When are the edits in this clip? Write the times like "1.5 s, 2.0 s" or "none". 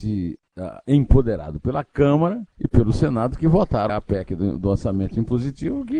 2.5 s, 3.9 s